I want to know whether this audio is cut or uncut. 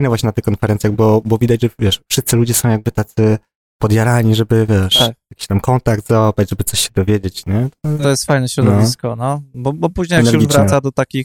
uncut